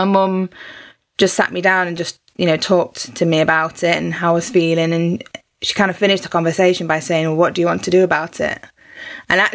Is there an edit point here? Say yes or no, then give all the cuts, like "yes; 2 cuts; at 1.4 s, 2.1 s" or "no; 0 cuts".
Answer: no; 0 cuts